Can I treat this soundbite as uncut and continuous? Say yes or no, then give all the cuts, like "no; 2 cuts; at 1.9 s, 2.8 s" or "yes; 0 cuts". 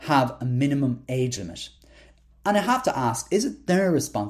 yes; 0 cuts